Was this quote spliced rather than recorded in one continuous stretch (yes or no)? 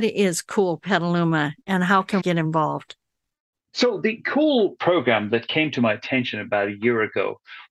yes